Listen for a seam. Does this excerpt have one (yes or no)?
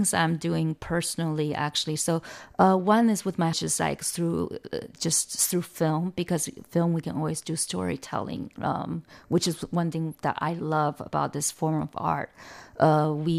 yes